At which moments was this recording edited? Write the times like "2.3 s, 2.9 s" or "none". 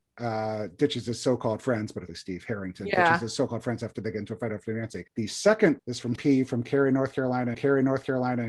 2.1 s, 5.1 s, 5.8 s, 6.2 s, 7.5 s